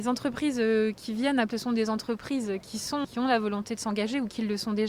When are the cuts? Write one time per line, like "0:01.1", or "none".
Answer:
0:01.5
0:03.0